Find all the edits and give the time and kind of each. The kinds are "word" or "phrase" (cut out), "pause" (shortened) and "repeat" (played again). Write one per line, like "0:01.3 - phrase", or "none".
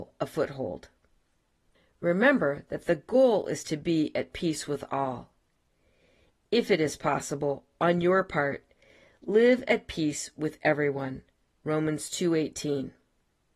none